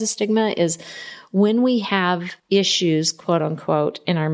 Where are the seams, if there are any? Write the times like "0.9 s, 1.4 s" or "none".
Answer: 2.4 s